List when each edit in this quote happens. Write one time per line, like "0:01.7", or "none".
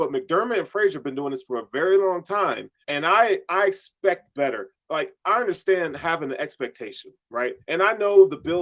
0:02.8
0:07.6